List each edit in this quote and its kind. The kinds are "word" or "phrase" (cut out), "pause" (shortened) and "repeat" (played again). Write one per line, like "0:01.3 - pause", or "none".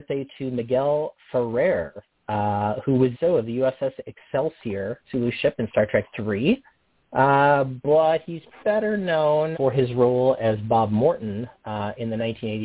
0:03.1 - word
0:05.1 - word
0:08.6 - word
0:09.5 - word

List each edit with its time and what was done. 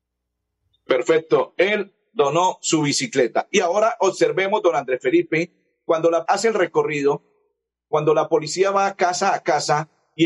0:06.3 - word

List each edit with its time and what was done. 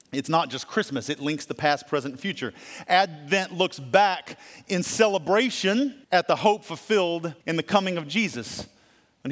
0:06.0 - pause
0:07.4 - pause

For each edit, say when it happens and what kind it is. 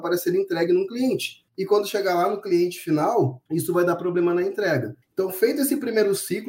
0:01.5 - pause
0:03.5 - pause
0:05.0 - pause

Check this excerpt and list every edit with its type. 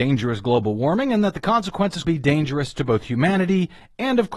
0:02.0 - word

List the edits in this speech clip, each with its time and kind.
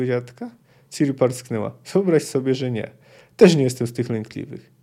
none

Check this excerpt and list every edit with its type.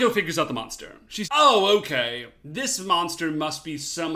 0:01.2 - word

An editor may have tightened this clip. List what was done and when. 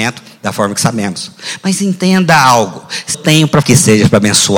0:03.1 - word
0:03.6 - word

